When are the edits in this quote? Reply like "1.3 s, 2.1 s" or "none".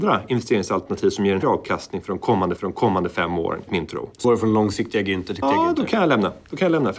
1.4 s, 2.6 s, 3.7 s, 4.2 s, 5.4 s